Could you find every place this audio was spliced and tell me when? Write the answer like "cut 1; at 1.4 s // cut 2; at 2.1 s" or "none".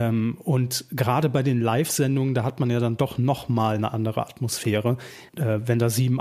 cut 1; at 5.3 s